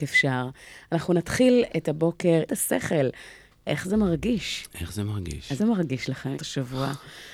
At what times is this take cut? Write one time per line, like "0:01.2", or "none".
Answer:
0:01.7
0:02.5
0:05.6
0:06.3